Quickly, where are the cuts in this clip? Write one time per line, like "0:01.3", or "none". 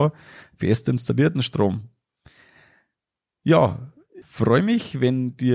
0:04.2